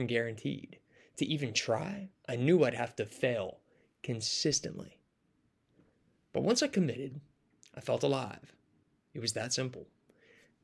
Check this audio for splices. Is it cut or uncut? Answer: uncut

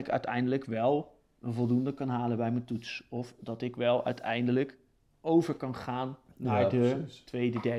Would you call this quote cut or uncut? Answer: uncut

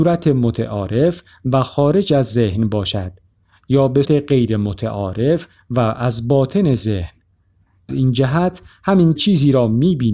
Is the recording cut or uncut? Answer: cut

